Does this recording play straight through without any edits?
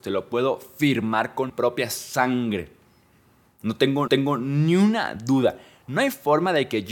no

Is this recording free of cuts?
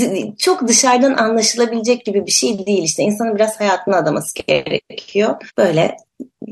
yes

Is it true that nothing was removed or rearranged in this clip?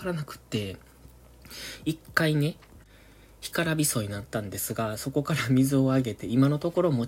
yes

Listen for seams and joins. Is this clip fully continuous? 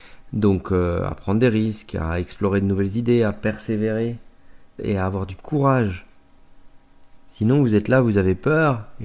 no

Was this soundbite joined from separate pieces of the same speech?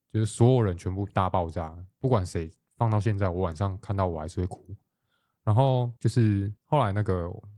yes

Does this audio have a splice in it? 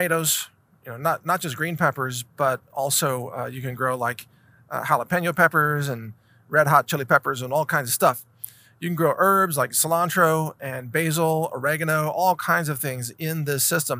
no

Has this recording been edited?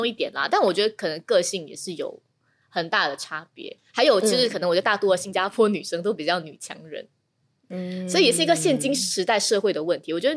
no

